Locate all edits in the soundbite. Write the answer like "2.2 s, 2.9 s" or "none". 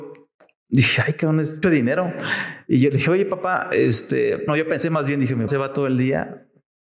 1.6 s, 4.5 s, 5.5 s

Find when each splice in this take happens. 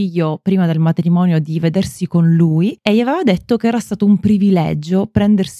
none

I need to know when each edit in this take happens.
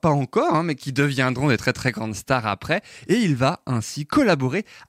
none

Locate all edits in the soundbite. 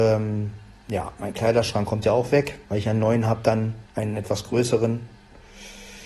2.6 s, 3.9 s

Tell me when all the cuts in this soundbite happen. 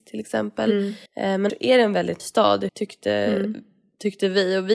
1.1 s, 1.5 s, 2.2 s, 2.7 s

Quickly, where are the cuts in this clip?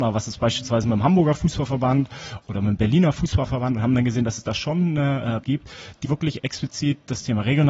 5.4 s, 6.0 s

